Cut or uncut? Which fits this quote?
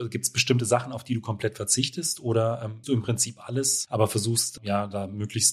cut